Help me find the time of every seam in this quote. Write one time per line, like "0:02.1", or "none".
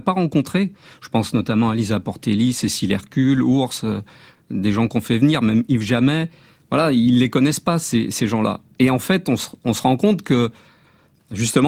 none

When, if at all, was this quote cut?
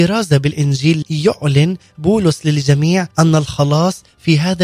0:01.0
0:03.1

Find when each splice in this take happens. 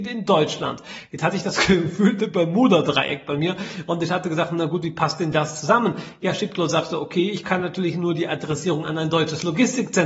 none

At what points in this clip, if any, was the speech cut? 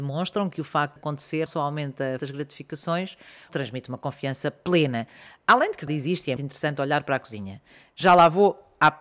0:01.0
0:01.5
0:02.2
0:03.5
0:05.9
0:06.4

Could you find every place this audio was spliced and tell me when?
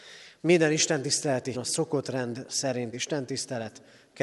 0:01.5
0:02.9

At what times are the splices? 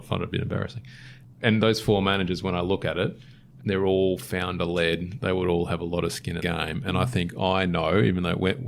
0:03.6
0:06.4

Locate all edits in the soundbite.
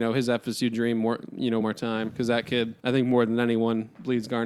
0:01.6
0:02.8

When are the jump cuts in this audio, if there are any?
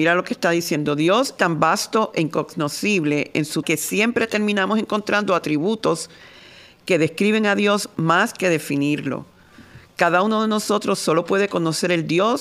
0:01.4
0:03.6

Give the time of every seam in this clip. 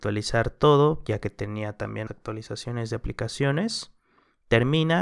0:02.1

